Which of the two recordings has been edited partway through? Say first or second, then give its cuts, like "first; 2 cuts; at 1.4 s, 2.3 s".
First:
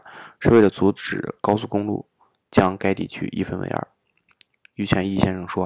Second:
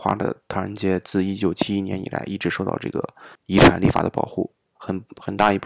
second; 1 cut; at 3.3 s